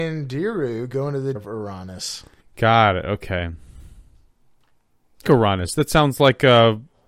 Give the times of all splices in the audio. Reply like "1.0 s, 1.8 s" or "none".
1.3 s, 2.4 s, 5.2 s

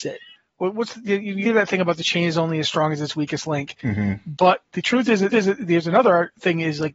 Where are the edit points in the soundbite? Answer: 1.4 s, 5.3 s

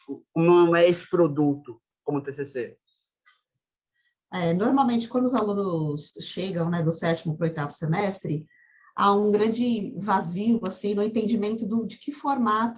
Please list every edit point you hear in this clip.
none

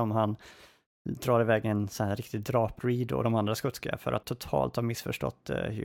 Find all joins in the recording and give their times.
2.8 s, 4.2 s

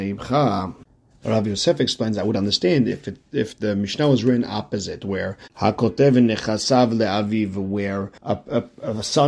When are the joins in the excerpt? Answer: 8.2 s

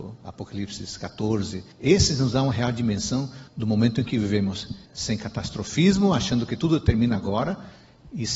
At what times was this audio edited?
1.7 s, 3.5 s, 4.9 s

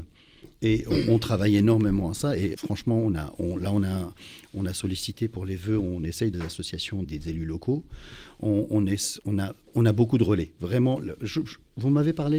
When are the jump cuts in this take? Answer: 2.5 s, 6.3 s, 7.0 s

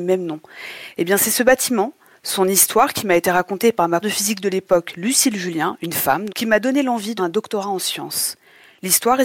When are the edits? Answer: 4.0 s, 6.3 s, 7.2 s

